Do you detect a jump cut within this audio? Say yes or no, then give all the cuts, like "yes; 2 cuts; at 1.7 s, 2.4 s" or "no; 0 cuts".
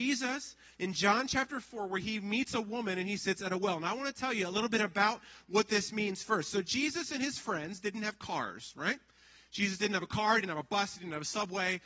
no; 0 cuts